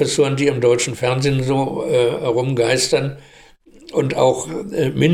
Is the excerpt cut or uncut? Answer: uncut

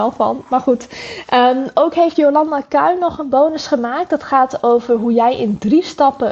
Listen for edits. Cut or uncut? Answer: uncut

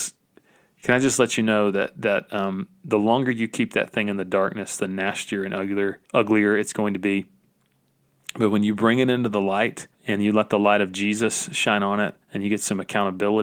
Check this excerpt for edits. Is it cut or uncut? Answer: cut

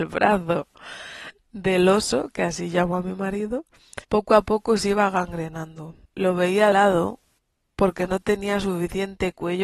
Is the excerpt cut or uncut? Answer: cut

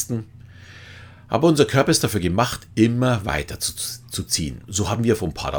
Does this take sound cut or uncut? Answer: uncut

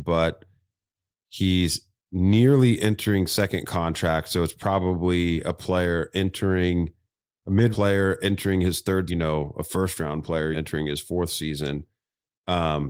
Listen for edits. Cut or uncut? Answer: cut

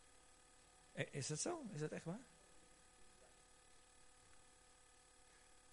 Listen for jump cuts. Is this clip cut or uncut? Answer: uncut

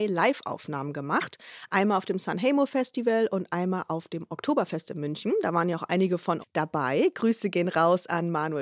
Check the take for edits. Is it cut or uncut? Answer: cut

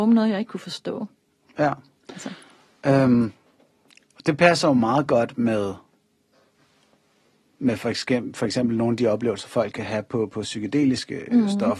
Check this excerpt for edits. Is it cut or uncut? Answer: uncut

